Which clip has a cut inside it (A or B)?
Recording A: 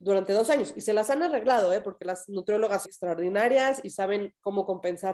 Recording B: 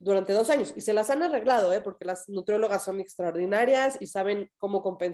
A